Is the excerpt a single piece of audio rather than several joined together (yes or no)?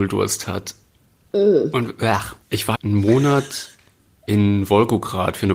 no